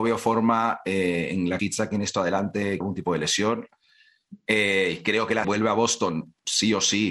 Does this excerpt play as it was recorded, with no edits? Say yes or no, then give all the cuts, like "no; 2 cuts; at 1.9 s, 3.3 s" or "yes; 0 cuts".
no; 3 cuts; at 1.6 s, 2.8 s, 5.4 s